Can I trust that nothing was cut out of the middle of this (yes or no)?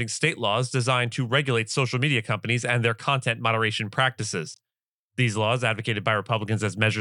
yes